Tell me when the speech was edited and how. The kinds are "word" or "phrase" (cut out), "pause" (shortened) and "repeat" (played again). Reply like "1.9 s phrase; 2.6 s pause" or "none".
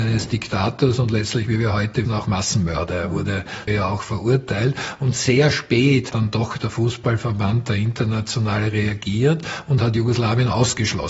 2.0 s word; 3.7 s word; 6.1 s word